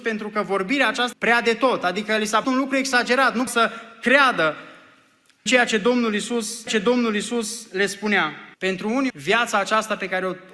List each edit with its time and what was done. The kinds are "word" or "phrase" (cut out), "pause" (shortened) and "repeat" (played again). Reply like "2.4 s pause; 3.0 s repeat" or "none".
1.1 s phrase; 2.4 s word; 3.5 s word; 5.5 s word; 6.7 s repeat; 8.5 s pause; 9.1 s word